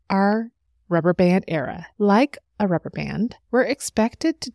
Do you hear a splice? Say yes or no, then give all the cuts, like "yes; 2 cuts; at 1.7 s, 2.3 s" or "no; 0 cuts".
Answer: yes; 2 cuts; at 1.9 s, 3.4 s